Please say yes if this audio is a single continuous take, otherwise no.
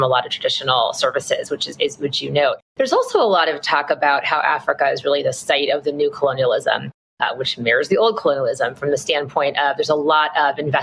yes